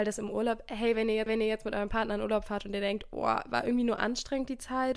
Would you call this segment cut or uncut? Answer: cut